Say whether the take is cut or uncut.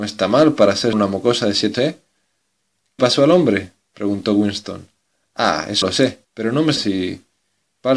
cut